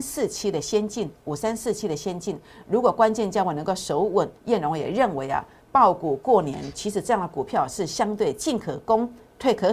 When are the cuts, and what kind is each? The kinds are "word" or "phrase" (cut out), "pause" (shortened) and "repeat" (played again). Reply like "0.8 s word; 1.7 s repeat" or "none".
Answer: 4.4 s pause